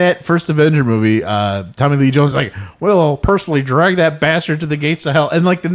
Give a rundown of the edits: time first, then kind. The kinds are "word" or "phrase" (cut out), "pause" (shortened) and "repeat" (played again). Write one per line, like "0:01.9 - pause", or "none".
none